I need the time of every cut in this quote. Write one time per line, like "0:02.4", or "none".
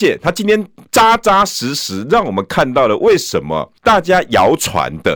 0:03.8